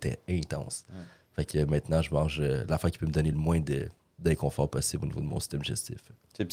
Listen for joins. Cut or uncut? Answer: uncut